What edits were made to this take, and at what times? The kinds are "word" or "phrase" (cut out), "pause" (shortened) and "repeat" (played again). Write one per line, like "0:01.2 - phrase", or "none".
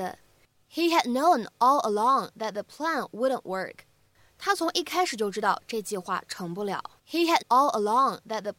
0:07.0 - pause
0:07.4 - word